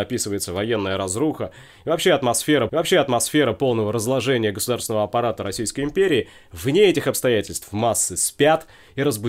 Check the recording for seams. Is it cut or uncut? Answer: cut